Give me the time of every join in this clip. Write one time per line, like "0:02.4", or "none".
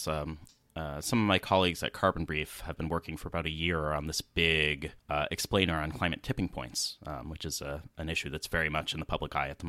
0:05.0